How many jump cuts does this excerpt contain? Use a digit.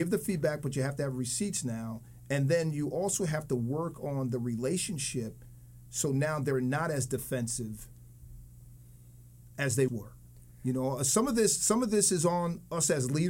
1